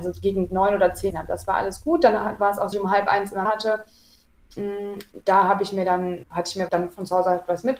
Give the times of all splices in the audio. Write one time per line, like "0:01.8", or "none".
0:01.1
0:02.7
0:03.5
0:06.2
0:06.7

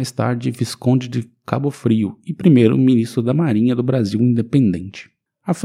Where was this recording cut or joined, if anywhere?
none

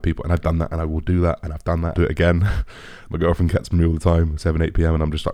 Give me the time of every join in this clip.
0:01.9
0:04.4

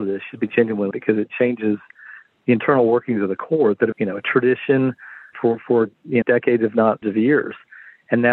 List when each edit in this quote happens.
0:00.9
0:01.3
0:03.9
0:05.3
0:06.2
0:07.0

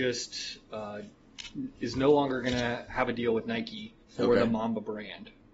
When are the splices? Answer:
0:04.0

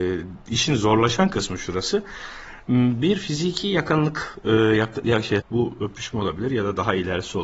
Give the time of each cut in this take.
0:05.4

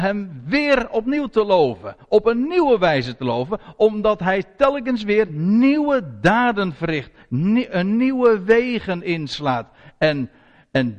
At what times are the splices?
none

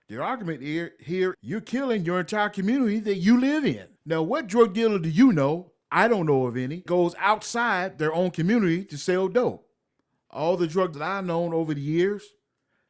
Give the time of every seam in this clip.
0:01.3
0:06.9
0:09.9
0:10.9

